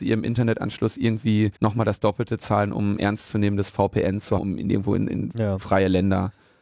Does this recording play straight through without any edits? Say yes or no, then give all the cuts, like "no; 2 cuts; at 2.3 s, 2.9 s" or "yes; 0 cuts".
no; 2 cuts; at 1.6 s, 4.4 s